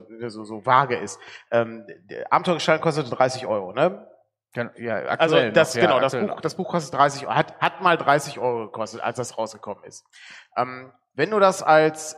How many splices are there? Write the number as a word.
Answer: zero